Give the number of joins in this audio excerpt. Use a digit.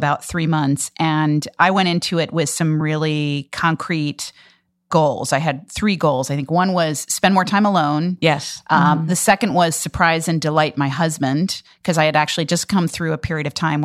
0